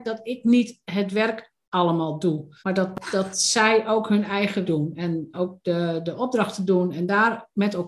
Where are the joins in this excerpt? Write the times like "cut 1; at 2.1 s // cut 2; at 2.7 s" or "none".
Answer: cut 1; at 2.6 s // cut 2; at 4.6 s // cut 3; at 5.3 s